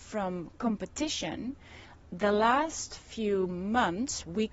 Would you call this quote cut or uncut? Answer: uncut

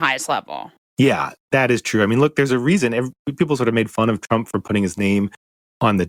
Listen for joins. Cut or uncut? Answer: cut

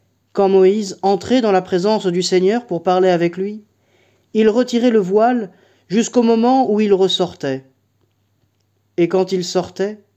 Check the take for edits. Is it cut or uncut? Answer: uncut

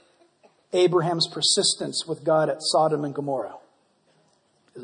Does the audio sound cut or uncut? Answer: uncut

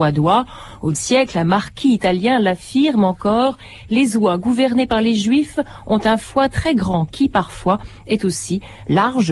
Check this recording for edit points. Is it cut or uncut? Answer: cut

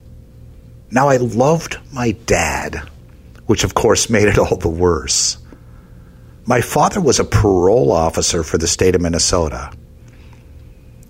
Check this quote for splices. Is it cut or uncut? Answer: uncut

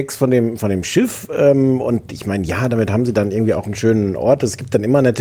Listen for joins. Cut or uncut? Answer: uncut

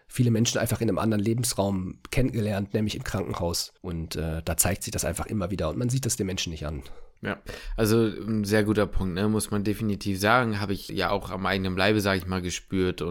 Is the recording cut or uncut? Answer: cut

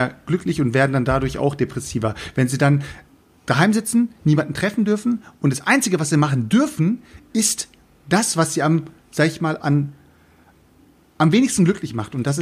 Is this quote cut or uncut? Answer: uncut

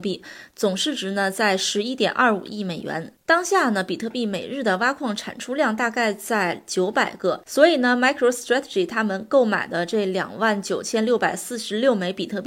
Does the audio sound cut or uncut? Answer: uncut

